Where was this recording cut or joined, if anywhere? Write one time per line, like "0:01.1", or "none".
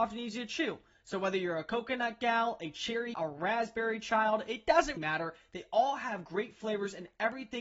0:03.1
0:05.0